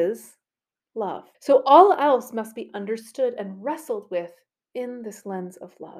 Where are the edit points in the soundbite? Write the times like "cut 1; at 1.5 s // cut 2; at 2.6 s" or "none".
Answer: cut 1; at 1.3 s